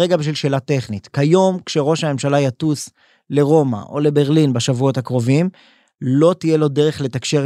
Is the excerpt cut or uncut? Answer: uncut